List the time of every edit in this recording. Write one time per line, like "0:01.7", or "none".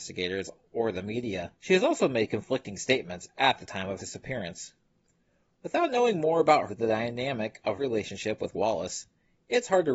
0:01.6
0:04.0
0:06.7
0:07.8
0:08.5